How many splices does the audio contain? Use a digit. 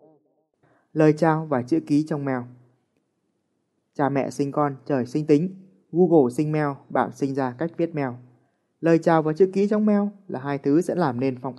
0